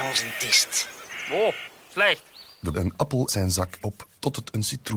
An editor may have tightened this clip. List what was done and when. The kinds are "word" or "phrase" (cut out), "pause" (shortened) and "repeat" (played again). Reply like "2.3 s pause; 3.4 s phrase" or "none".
1.8 s pause; 2.7 s phrase; 3.3 s word; 3.8 s phrase